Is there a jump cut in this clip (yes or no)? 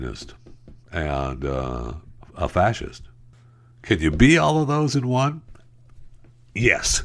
no